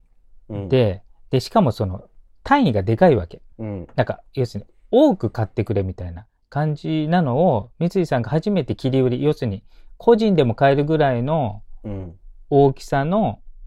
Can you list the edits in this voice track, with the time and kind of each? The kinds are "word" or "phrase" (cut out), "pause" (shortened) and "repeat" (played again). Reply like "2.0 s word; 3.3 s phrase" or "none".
3.5 s pause